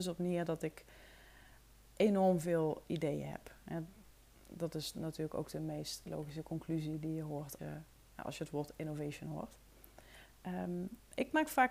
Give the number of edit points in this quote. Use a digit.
1